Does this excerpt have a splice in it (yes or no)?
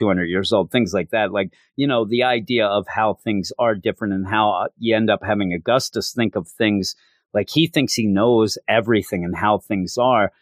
no